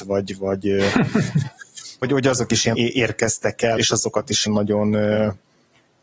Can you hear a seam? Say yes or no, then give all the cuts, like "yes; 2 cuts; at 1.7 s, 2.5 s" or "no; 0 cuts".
yes; 4 cuts; at 2.0 s, 2.7 s, 3.8 s, 4.5 s